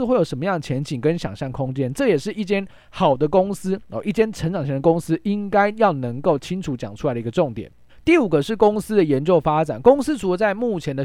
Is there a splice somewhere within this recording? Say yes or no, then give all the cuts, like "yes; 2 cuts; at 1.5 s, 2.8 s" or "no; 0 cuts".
yes; 1 cut; at 7.9 s